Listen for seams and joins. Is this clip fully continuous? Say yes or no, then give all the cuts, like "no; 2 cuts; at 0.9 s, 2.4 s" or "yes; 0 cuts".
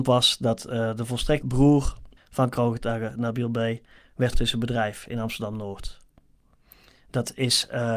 no; 3 cuts; at 1.4 s, 2.2 s, 4.3 s